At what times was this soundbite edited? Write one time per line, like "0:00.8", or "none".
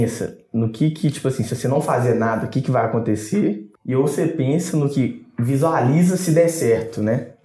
0:03.8